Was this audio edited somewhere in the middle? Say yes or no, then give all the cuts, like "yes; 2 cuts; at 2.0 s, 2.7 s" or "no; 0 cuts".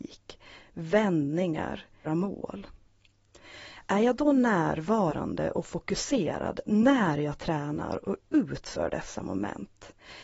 yes; 1 cut; at 2.1 s